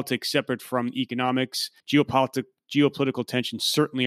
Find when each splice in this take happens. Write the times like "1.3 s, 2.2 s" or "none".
1.8 s